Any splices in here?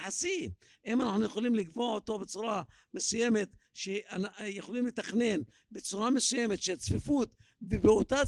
no; 0 cuts

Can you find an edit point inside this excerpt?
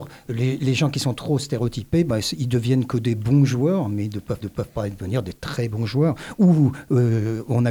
yes; 1 cut; at 4.4 s

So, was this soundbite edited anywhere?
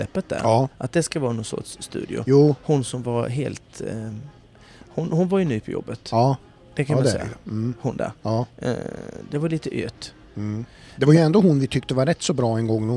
no; 0 cuts

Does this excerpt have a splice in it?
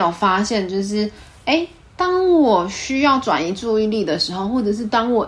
no; 0 cuts

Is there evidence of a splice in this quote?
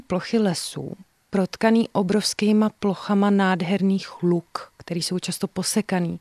no; 0 cuts

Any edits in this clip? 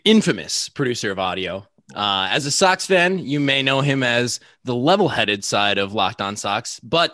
no; 0 cuts

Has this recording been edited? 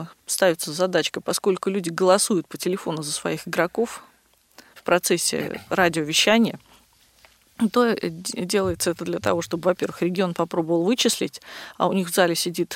no; 0 cuts

